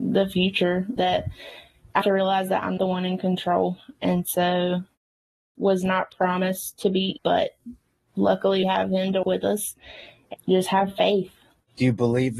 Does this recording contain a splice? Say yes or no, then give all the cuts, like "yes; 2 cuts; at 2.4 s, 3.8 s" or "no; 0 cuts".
yes; 7 cuts; at 1.0 s, 2.0 s, 2.8 s, 5.6 s, 7.2 s, 8.6 s, 9.2 s